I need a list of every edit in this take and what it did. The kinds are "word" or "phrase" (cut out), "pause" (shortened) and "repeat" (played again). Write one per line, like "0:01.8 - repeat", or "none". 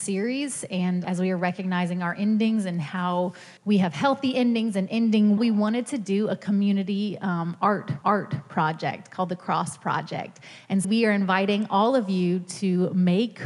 0:01.0 - word
0:03.6 - pause
0:05.4 - word
0:08.0 - repeat
0:10.8 - phrase